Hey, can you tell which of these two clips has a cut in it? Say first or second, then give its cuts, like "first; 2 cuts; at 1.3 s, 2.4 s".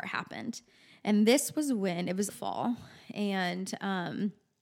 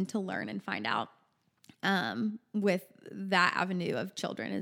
first; 1 cut; at 2.3 s